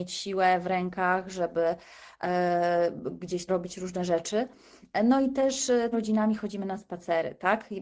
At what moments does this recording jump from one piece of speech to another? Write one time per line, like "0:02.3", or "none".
0:03.5
0:05.9